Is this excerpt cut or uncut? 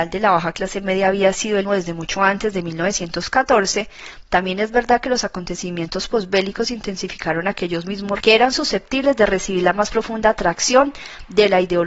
cut